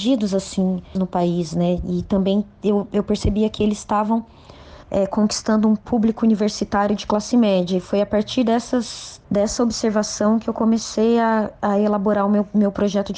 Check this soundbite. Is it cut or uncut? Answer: cut